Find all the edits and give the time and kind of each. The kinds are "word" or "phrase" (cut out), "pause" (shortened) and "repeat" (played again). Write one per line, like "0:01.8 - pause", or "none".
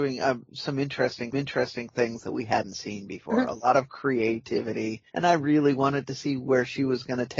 0:01.3 - repeat
0:05.1 - pause

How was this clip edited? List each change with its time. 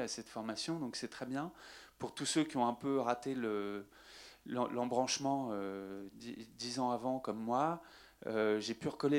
none

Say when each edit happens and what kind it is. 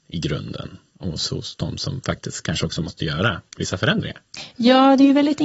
0:03.5 - pause

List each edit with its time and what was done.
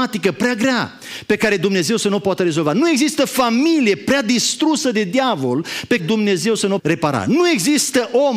0:06.0 - word
0:06.8 - word

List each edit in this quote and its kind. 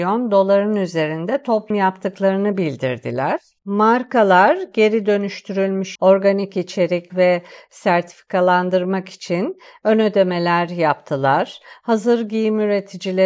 0:01.7 - word
0:03.6 - pause
0:06.0 - word
0:07.1 - phrase

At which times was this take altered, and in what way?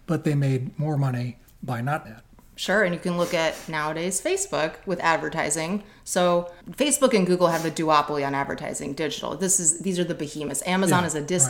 0:02.0 - word
0:06.6 - pause

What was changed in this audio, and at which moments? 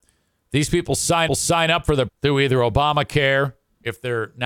0:01.3 - repeat
0:02.1 - word

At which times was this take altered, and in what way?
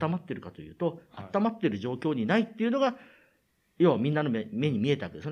none

